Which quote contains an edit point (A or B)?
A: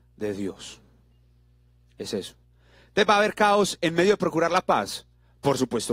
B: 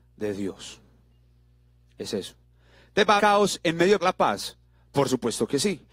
B